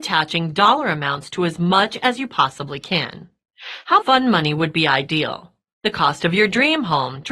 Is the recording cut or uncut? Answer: cut